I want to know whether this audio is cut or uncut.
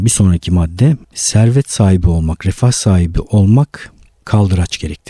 cut